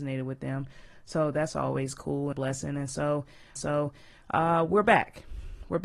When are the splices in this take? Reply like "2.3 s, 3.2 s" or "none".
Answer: 2.3 s, 3.6 s